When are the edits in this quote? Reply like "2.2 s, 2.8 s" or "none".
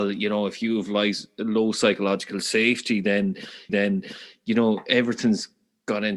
3.7 s